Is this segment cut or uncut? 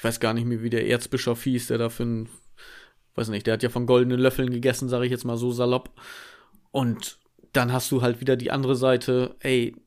uncut